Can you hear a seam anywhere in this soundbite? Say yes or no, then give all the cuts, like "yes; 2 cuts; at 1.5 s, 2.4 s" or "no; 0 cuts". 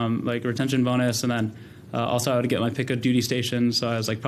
no; 0 cuts